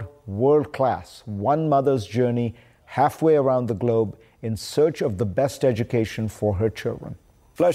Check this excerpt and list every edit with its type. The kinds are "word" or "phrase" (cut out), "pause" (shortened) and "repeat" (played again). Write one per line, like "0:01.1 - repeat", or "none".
none